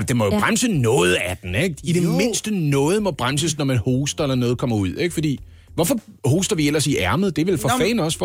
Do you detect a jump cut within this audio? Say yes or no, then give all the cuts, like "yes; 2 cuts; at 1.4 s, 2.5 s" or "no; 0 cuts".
no; 0 cuts